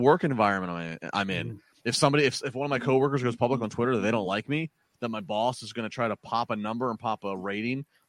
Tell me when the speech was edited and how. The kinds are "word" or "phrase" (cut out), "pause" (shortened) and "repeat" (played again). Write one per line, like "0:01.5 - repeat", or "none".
none